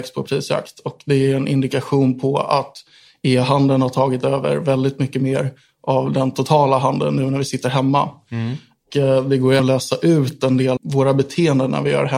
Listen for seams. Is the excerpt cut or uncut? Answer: cut